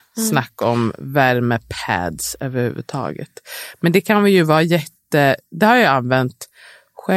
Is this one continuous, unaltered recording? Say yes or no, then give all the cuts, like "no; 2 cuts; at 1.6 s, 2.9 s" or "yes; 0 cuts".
yes; 0 cuts